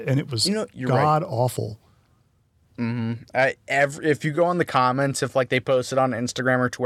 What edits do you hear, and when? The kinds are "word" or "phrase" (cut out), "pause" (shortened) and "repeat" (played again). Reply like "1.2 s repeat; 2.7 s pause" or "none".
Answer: none